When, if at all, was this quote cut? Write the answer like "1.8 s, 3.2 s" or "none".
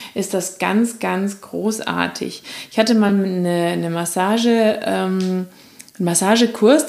none